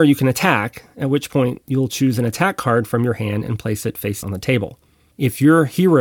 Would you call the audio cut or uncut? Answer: cut